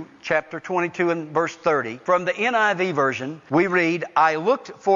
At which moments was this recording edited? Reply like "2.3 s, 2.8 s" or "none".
none